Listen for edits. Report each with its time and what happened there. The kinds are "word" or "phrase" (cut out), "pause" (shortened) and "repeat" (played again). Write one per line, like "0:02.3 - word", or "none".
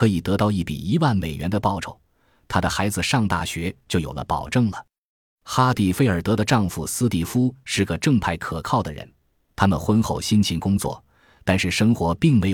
none